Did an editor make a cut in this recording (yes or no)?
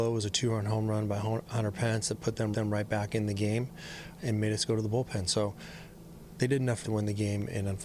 yes